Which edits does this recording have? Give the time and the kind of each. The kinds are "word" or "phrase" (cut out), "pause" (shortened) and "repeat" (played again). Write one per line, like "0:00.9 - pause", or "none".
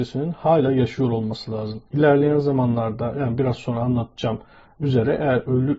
0:01.9 - pause